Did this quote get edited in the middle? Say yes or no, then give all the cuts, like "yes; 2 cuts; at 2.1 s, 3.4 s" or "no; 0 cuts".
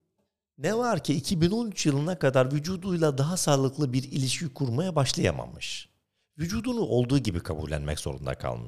no; 0 cuts